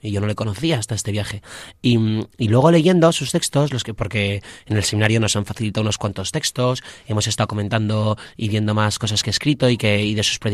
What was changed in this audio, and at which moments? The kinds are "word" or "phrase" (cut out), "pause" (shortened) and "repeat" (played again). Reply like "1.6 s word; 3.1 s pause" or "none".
none